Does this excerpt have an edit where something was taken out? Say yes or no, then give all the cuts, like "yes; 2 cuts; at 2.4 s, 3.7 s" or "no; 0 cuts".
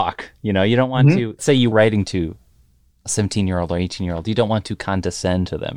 yes; 2 cuts; at 1.4 s, 1.7 s